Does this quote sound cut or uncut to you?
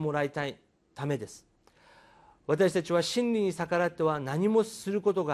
uncut